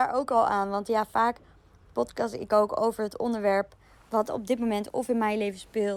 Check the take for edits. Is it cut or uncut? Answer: uncut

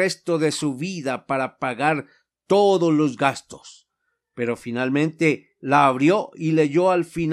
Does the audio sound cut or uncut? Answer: uncut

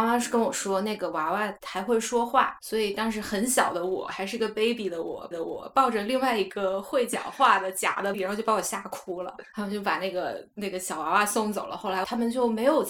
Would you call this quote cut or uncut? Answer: cut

